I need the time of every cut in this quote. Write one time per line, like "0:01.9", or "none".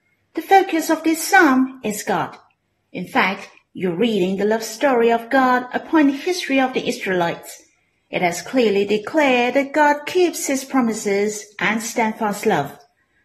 none